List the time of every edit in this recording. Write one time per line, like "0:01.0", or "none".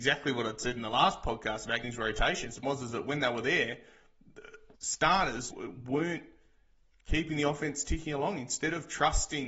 0:01.8
0:02.6
0:04.7
0:05.5